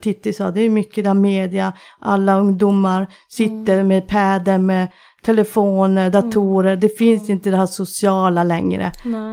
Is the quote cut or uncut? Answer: uncut